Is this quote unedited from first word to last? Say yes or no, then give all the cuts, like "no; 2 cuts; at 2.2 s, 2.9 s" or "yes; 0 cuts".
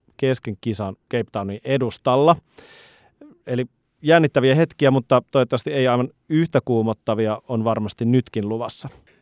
yes; 0 cuts